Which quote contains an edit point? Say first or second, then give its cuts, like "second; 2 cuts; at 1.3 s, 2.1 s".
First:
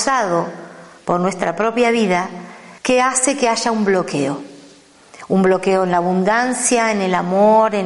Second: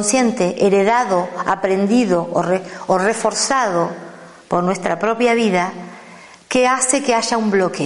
first; 1 cut; at 2.8 s